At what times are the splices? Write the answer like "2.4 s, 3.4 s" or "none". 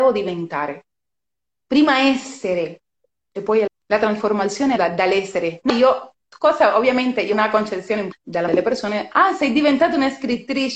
3.7 s, 4.8 s, 5.7 s, 7.3 s, 8.1 s, 8.5 s